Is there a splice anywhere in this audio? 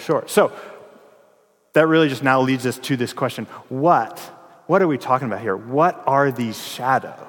no; 0 cuts

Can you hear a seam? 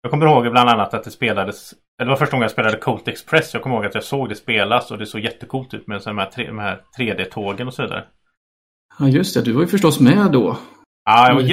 no; 0 cuts

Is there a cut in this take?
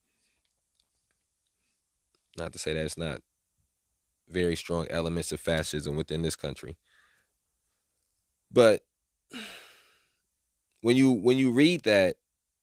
no; 0 cuts

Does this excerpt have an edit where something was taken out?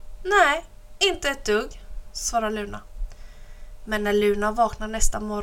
no; 0 cuts

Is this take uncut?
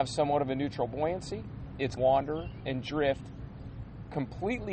no; 1 cut; at 2.0 s

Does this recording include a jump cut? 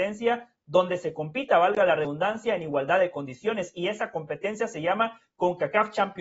no; 0 cuts

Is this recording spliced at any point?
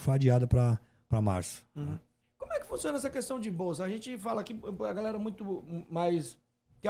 no; 0 cuts

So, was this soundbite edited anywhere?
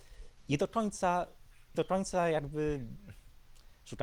yes; 1 cut; at 1.7 s

